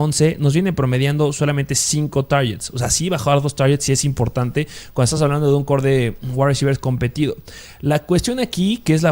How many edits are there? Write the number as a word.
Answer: zero